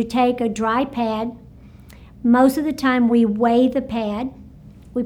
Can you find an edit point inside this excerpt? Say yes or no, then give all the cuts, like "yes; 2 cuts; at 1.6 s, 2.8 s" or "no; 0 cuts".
no; 0 cuts